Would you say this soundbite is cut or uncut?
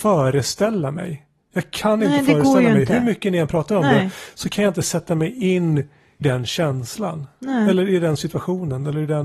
cut